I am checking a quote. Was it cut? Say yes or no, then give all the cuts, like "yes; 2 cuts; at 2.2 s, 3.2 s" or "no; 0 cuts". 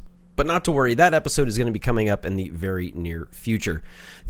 no; 0 cuts